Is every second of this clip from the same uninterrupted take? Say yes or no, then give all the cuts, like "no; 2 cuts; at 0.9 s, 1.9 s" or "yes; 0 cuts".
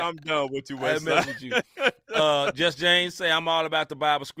yes; 0 cuts